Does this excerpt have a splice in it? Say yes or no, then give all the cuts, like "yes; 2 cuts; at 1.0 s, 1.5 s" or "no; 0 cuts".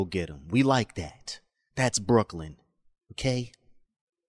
no; 0 cuts